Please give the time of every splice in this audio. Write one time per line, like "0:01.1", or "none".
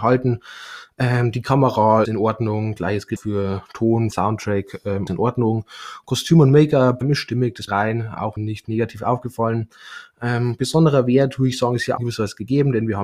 0:02.0
0:03.2
0:04.1
0:05.1
0:07.0
0:07.7
0:08.4
0:12.0